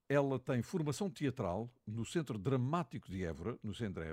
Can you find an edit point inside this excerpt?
no; 0 cuts

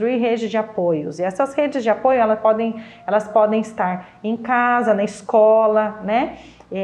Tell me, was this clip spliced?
no; 0 cuts

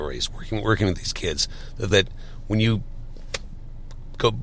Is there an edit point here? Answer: yes; 1 cut; at 1.9 s

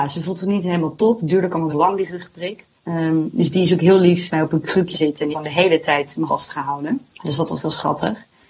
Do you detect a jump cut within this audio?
yes; 8 cuts; at 1.7 s, 2.8 s, 4.3 s, 4.9 s, 5.3 s, 6.3 s, 7.1 s, 7.6 s

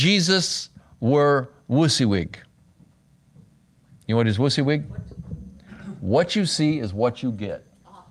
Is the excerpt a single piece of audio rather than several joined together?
yes; 0 cuts

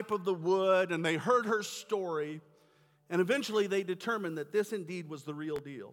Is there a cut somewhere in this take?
no; 0 cuts

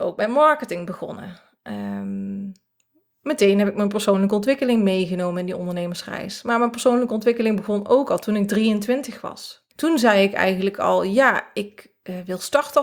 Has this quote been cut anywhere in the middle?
yes; 2 cuts; at 2.8 s, 9.7 s

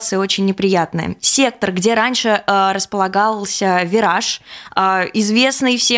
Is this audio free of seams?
yes; 0 cuts

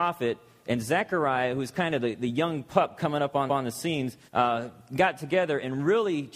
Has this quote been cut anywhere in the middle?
yes; 2 cuts; at 3.5 s, 4.3 s

